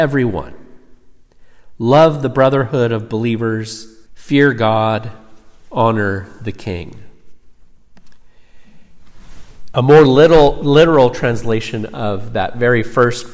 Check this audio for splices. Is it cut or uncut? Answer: cut